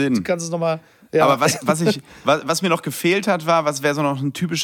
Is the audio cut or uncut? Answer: uncut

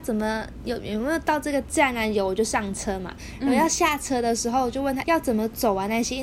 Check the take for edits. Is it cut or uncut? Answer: cut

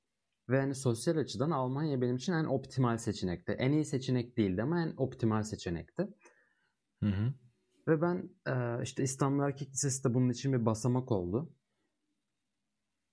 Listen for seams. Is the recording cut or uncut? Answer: uncut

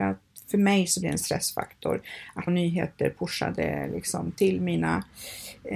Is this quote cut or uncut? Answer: cut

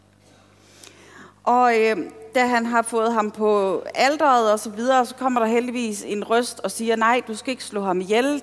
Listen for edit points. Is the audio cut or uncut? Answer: uncut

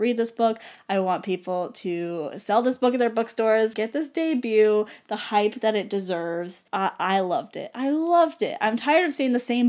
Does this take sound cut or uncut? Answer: cut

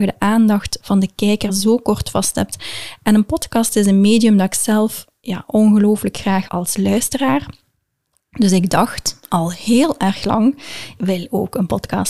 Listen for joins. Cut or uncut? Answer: cut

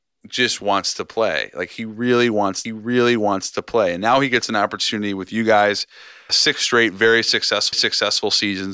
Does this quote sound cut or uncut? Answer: cut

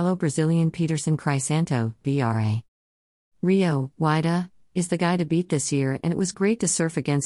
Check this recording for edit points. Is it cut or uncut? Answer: uncut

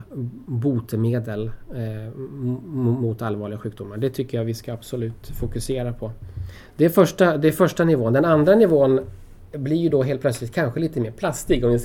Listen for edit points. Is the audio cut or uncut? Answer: uncut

